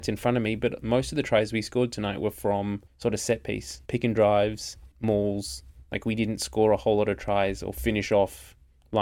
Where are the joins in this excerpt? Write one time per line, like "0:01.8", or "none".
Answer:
0:02.9
0:03.9
0:04.9